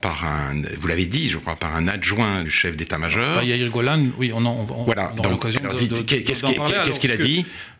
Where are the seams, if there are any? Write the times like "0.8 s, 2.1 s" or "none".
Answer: 2.5 s

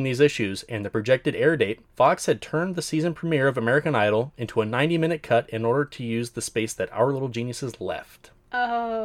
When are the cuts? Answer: 1.9 s

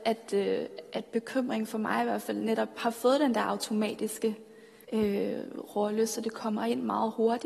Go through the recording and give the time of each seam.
4.8 s

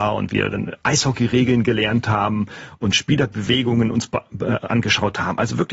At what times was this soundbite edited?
none

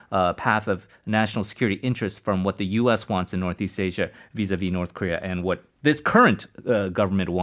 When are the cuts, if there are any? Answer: none

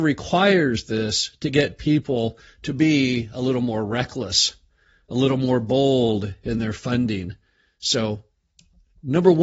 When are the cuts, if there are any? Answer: none

